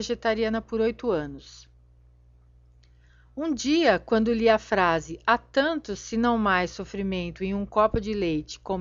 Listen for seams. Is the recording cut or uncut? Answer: uncut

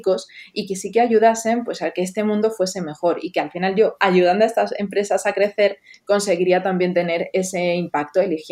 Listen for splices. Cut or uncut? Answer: uncut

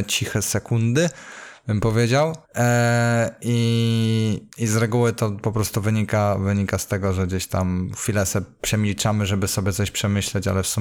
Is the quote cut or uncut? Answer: cut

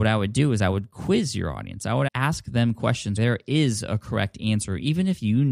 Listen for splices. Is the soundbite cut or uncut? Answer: cut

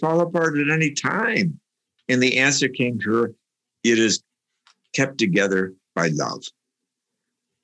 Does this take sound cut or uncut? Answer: uncut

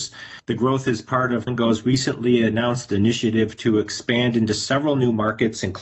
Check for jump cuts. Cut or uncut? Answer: cut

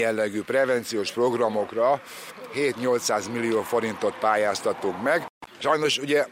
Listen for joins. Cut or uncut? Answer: uncut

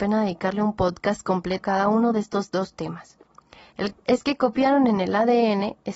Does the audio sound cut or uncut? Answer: cut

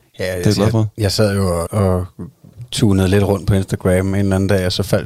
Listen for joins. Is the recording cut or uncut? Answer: cut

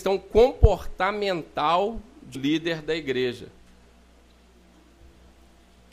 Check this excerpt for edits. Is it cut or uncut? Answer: cut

